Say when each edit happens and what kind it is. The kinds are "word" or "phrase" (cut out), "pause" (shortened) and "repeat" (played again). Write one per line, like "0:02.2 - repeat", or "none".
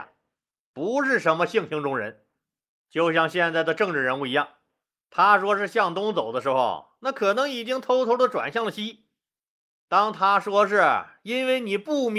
none